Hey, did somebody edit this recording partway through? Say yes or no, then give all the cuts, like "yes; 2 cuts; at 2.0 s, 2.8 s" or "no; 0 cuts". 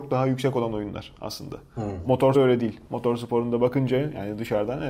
yes; 1 cut; at 2.3 s